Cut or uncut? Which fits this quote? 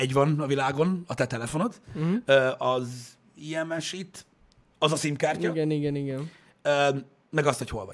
uncut